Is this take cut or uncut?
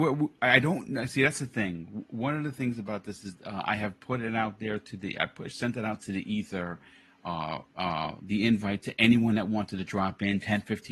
uncut